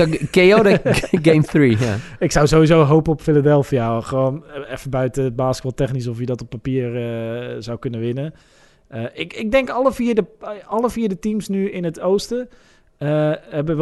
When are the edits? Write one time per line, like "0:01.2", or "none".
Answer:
none